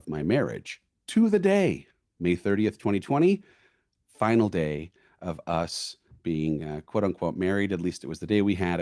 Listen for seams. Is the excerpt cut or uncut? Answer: uncut